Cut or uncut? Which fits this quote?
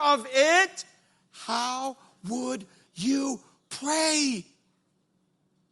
uncut